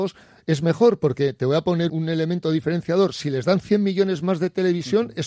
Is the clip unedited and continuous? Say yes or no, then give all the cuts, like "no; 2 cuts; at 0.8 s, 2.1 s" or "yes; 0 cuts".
no; 1 cut; at 1.9 s